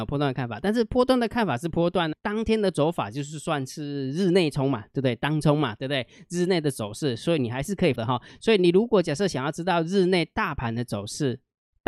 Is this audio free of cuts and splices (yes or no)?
no